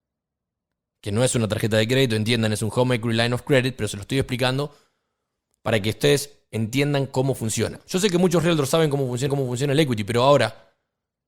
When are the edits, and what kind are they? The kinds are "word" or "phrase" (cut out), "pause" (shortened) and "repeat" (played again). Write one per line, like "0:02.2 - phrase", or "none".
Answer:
0:09.3 - repeat